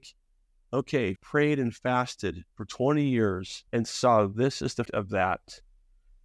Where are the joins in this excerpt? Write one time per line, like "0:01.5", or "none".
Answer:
0:01.2
0:02.5
0:03.7
0:04.9